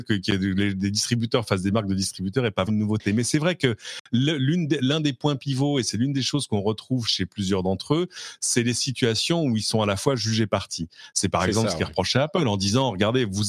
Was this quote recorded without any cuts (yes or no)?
no